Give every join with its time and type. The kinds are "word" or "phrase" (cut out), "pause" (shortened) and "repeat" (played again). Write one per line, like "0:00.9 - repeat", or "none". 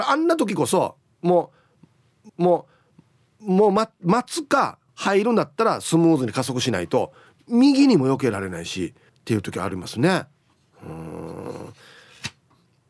0:02.3 - repeat
0:04.9 - pause
0:09.1 - pause